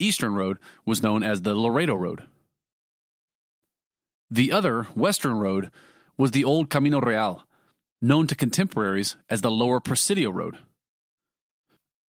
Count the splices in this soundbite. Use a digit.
0